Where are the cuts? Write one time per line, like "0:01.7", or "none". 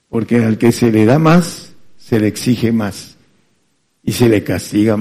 none

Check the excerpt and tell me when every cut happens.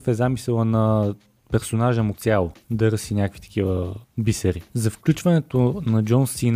0:02.1

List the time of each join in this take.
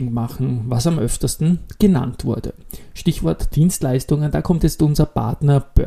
0:03.5

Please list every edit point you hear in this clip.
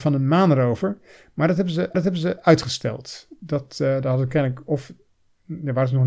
0:01.9

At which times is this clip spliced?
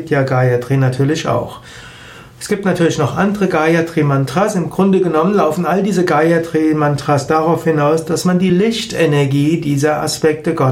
none

